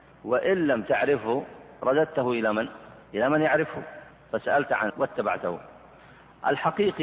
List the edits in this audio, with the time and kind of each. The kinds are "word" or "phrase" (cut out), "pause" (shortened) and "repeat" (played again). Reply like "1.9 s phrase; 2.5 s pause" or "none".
3.0 s pause; 4.1 s pause; 4.9 s word